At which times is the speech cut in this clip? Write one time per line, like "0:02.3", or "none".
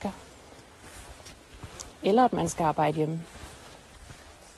none